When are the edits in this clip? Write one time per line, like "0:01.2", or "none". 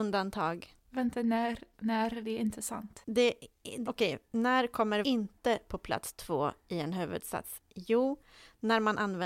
0:01.7
0:03.8
0:05.0